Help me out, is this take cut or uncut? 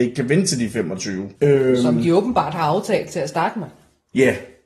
cut